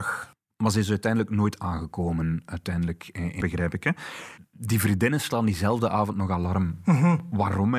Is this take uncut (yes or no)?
no